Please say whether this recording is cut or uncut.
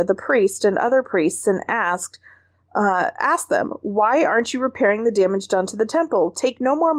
uncut